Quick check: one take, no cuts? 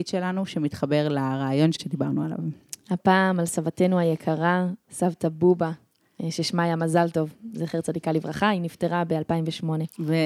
no; 1 cut; at 1.8 s

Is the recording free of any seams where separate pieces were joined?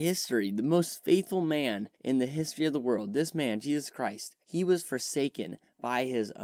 no; 2 cuts; at 1.9 s, 4.4 s

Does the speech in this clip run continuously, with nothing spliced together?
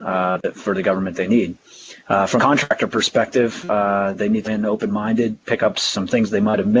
no; 6 cuts; at 1.1 s, 2.0 s, 2.4 s, 4.4 s, 5.4 s, 5.7 s

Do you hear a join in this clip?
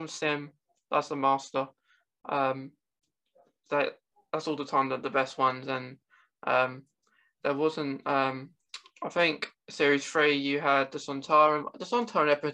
no; 0 cuts

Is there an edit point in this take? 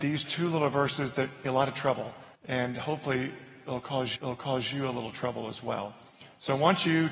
yes; 3 cuts; at 1.5 s, 2.3 s, 4.2 s

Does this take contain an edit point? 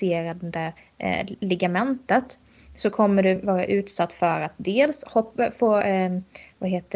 no; 0 cuts

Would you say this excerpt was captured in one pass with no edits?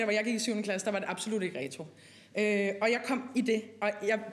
yes; 0 cuts

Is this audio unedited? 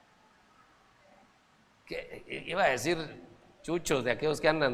yes; 0 cuts

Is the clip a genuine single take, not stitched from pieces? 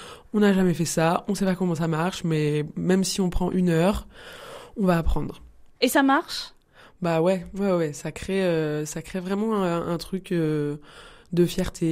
no; 1 cut; at 5.7 s

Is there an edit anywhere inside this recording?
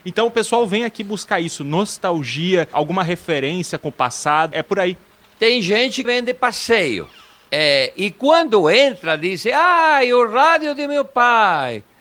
yes; 3 cuts; at 2.7 s, 4.5 s, 6.0 s

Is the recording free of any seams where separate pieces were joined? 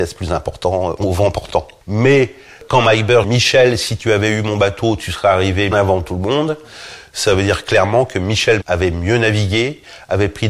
no; 3 cuts; at 3.2 s, 5.7 s, 8.6 s

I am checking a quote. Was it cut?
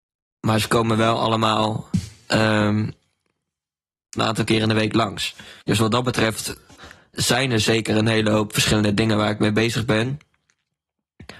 yes; 3 cuts; at 4.2 s, 5.6 s, 7.1 s

